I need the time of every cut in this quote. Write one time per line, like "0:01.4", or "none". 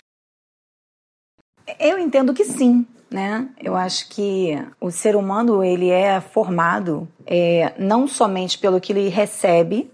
0:04.7
0:07.1